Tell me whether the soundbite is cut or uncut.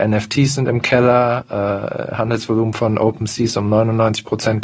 uncut